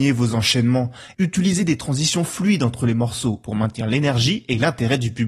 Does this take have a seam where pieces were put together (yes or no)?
no